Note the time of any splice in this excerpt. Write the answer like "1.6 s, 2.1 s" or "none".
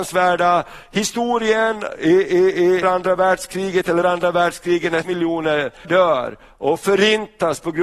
2.8 s, 4.0 s, 5.0 s, 5.8 s